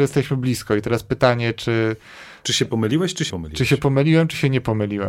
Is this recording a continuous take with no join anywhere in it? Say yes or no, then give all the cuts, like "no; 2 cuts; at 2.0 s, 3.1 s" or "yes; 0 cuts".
no; 1 cut; at 3.3 s